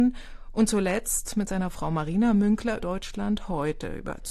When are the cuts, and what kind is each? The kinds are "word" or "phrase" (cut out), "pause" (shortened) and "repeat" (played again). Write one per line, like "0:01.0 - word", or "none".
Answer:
0:02.8 - word